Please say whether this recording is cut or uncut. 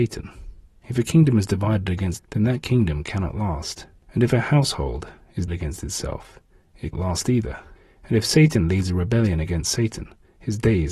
cut